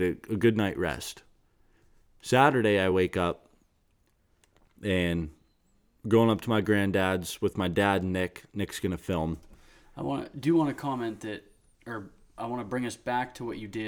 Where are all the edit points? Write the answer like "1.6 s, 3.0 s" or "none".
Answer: none